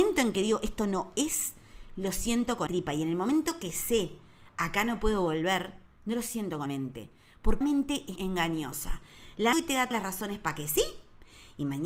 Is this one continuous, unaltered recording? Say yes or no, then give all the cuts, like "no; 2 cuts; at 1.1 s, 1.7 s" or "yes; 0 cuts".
no; 6 cuts; at 2.7 s, 6.7 s, 7.6 s, 8.2 s, 9.5 s, 9.9 s